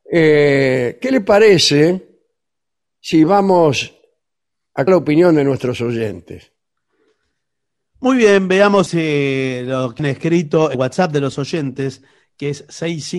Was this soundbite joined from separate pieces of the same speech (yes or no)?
yes